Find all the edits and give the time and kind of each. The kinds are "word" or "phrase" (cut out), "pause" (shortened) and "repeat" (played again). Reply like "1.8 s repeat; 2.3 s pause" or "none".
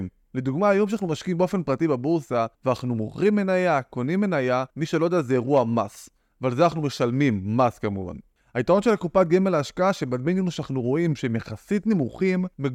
2.5 s pause; 4.7 s pause